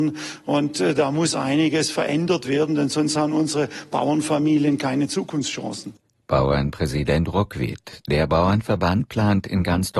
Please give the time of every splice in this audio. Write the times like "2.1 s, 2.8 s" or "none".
none